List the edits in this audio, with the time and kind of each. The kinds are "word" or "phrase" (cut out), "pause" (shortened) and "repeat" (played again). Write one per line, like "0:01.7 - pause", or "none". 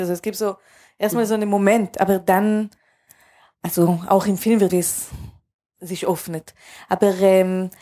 0:04.7 - word